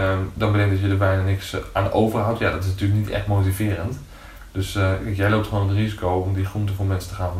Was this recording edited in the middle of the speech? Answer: no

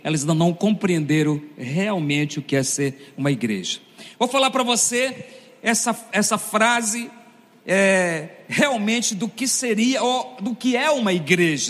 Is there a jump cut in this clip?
no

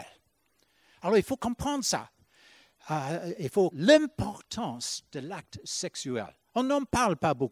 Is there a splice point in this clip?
yes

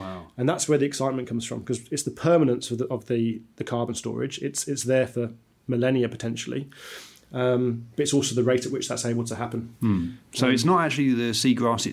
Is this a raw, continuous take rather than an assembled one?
yes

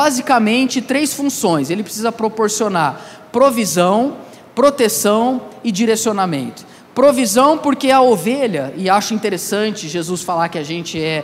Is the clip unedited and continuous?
yes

